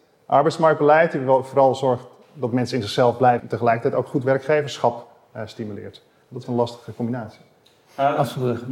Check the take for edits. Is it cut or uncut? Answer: cut